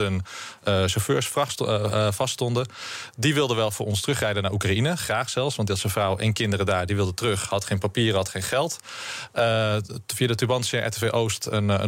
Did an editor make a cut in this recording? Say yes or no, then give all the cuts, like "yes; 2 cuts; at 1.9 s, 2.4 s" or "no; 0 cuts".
no; 0 cuts